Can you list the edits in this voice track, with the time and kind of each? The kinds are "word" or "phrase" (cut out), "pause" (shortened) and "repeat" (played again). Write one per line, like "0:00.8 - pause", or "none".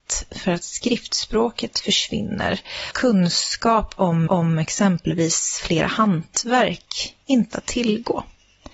0:02.9 - word
0:04.3 - repeat
0:07.5 - phrase